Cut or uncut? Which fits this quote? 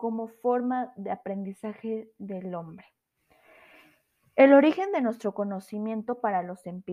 uncut